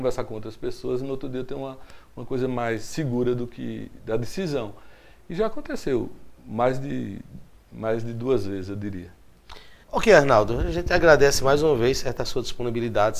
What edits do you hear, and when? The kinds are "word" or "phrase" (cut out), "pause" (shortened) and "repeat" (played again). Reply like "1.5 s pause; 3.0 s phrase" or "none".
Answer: 9.8 s pause